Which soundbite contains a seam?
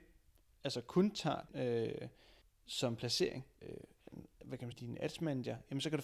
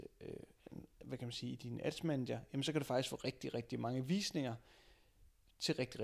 first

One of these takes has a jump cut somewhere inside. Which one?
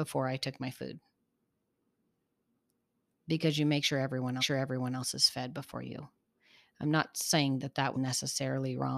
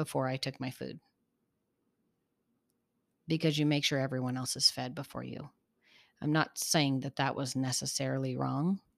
first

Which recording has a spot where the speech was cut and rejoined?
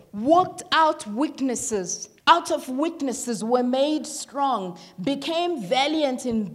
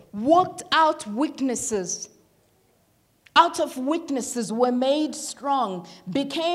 first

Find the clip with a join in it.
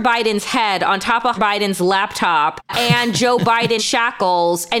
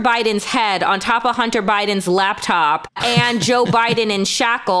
first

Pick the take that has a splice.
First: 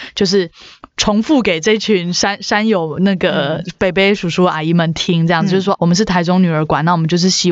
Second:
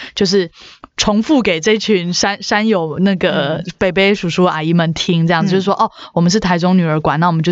first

